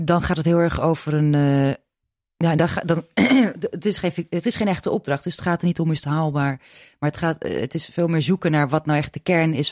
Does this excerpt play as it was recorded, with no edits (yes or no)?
yes